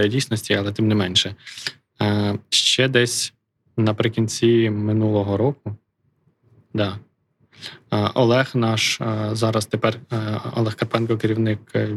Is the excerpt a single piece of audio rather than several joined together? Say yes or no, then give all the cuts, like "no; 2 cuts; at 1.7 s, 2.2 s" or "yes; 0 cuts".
yes; 0 cuts